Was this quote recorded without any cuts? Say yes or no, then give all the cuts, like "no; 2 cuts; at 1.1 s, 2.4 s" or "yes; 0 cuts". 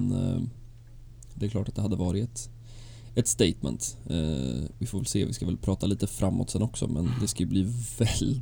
yes; 0 cuts